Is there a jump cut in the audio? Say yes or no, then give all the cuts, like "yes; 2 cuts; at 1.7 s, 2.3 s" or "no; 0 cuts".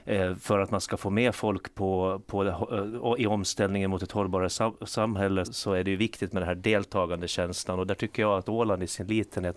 yes; 1 cut; at 5.4 s